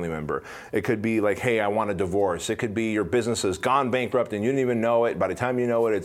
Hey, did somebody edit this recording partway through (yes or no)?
no